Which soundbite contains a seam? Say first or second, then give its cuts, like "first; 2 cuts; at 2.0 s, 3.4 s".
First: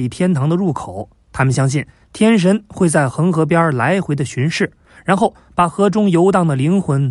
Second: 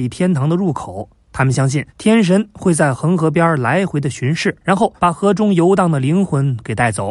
second; 3 cuts; at 1.9 s, 4.6 s, 5.0 s